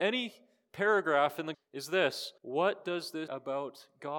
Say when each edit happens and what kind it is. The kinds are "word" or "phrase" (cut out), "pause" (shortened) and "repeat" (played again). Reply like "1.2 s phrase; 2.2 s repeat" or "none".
1.5 s word; 2.4 s pause; 3.3 s word